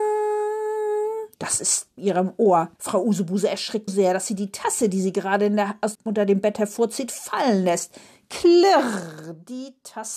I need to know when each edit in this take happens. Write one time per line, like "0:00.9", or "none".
0:01.3
0:02.0
0:02.8
0:03.9
0:05.9